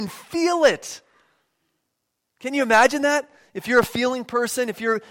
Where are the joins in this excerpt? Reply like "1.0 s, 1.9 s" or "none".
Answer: none